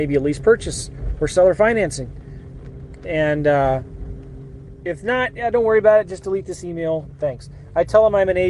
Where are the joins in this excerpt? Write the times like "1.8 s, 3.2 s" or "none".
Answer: none